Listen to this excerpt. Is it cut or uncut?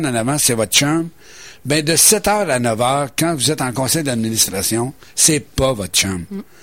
uncut